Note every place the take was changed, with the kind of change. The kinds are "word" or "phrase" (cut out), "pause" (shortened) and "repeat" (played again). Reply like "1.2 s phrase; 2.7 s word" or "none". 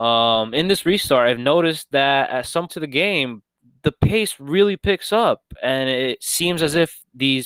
2.7 s word